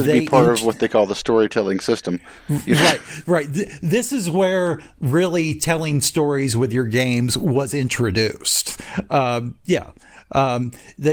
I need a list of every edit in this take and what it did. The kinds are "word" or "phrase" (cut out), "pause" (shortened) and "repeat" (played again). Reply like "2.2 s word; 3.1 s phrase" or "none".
none